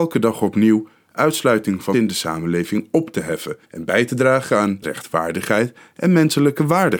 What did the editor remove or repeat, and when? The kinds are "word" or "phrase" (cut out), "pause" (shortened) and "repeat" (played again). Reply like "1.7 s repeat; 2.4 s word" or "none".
1.9 s word; 3.6 s pause; 4.8 s word